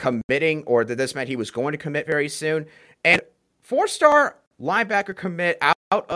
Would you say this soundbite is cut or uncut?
uncut